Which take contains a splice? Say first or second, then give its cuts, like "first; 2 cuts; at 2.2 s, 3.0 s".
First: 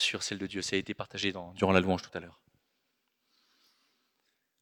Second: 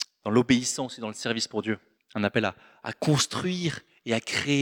second; 1 cut; at 2.0 s